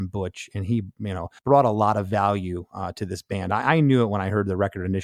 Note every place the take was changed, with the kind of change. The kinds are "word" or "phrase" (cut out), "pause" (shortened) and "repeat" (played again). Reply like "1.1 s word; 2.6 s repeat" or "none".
1.4 s pause